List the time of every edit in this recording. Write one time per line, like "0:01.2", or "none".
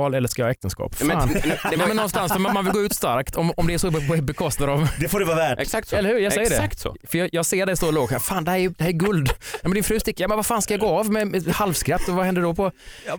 0:09.6